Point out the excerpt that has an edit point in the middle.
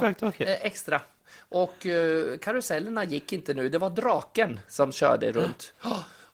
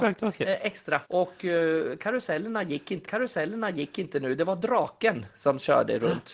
second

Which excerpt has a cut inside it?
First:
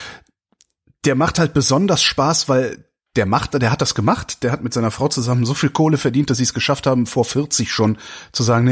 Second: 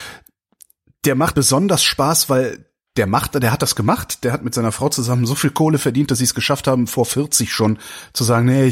second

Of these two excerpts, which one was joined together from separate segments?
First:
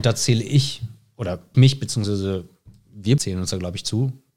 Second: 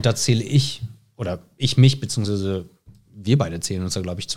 first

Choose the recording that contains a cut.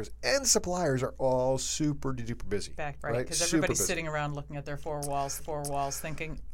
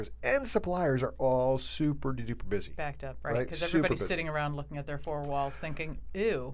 first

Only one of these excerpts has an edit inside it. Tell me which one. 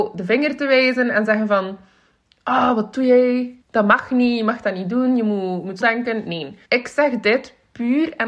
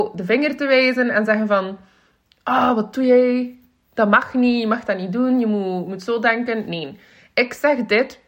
first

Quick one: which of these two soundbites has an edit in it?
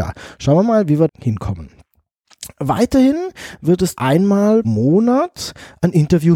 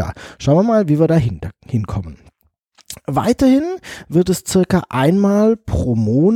first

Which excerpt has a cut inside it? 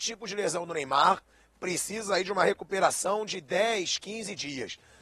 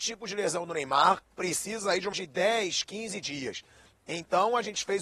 second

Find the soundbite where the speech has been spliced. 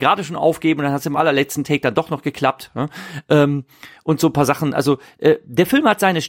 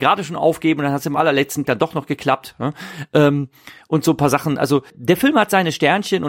second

